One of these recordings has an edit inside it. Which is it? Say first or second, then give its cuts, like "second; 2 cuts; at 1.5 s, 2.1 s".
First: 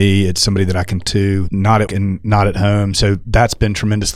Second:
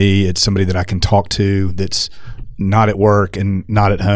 first; 3 cuts; at 1.0 s, 1.5 s, 1.9 s